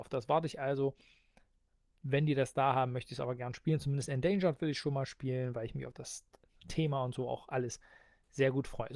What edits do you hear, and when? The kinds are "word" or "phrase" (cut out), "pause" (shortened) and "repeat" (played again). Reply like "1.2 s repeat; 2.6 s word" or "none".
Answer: none